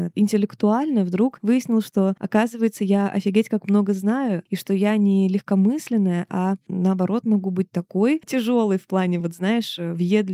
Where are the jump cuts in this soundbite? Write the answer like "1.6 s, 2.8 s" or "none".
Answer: none